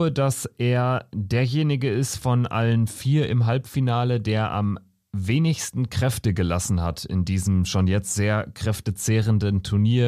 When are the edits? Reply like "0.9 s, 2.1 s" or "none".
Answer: none